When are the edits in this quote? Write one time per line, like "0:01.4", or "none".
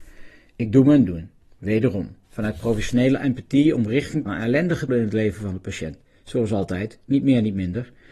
0:02.2
0:04.3
0:04.9